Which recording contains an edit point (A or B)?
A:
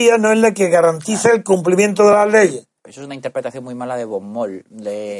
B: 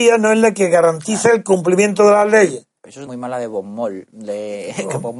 B